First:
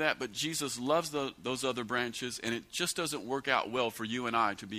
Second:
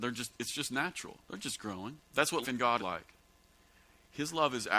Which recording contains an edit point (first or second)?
second